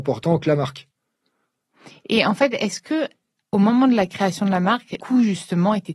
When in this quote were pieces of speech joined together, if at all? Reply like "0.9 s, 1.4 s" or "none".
5.0 s